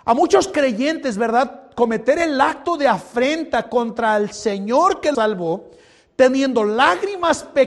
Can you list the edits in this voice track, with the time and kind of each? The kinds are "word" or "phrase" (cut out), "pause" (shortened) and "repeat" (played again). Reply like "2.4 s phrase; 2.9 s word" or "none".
5.1 s word